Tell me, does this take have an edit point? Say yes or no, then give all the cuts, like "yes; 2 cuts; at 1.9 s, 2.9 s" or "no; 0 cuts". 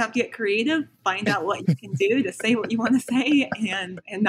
no; 0 cuts